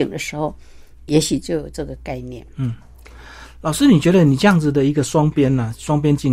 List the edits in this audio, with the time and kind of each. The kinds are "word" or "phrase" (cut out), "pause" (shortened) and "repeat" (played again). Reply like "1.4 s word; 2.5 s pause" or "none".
2.5 s pause